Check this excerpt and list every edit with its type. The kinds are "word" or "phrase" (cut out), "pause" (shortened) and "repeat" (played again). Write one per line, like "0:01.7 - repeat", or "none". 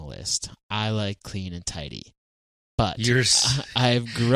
0:01.2 - word